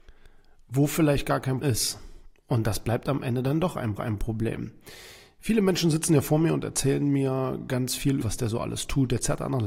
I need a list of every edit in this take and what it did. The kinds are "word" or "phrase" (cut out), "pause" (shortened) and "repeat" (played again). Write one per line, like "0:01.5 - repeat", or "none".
0:01.6 - word
0:04.0 - repeat
0:08.2 - phrase